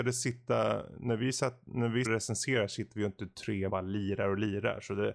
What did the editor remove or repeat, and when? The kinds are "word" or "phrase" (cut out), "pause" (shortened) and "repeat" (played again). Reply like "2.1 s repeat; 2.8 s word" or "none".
2.0 s word; 3.7 s phrase